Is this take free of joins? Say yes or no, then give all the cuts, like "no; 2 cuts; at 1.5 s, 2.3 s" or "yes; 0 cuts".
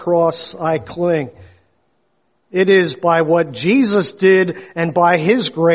yes; 0 cuts